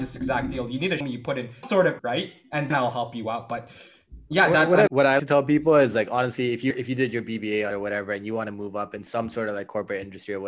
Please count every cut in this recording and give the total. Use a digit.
8